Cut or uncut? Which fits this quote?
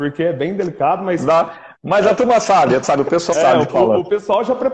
cut